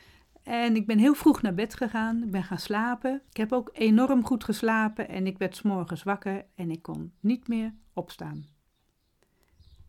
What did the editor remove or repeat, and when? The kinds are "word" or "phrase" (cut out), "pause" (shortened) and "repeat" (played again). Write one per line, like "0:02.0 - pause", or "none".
0:03.3 - pause